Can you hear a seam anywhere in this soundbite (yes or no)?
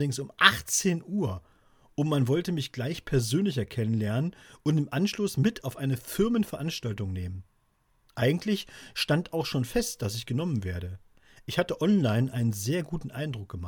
no